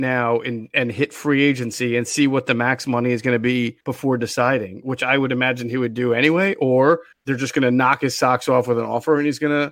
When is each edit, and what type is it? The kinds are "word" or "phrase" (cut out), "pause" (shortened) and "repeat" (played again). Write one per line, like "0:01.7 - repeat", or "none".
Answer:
0:03.8 - pause
0:07.1 - pause